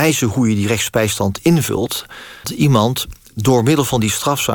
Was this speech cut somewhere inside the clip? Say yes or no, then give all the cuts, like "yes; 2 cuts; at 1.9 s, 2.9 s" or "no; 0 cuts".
yes; 1 cut; at 2.4 s